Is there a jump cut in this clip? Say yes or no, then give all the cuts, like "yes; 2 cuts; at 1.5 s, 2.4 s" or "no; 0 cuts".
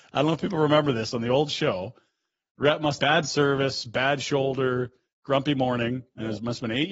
yes; 1 cut; at 3.0 s